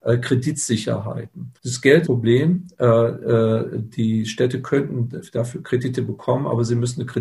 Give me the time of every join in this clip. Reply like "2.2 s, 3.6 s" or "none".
1.6 s, 2.1 s